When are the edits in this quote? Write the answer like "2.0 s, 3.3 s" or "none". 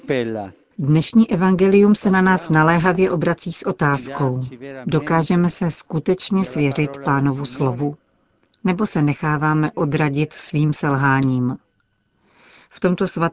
none